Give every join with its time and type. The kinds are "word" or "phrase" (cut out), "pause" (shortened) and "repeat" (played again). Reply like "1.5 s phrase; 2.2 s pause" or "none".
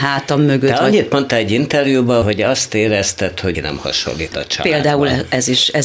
2.2 s word; 3.5 s phrase; 4.3 s word